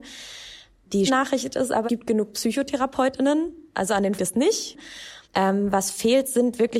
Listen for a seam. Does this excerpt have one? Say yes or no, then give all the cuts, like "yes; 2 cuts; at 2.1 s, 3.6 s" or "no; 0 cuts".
yes; 4 cuts; at 1.1 s, 1.9 s, 4.2 s, 5.2 s